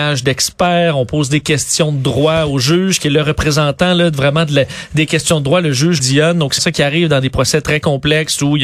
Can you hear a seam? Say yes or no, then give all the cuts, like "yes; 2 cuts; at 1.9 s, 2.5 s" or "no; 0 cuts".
yes; 2 cuts; at 6.0 s, 6.6 s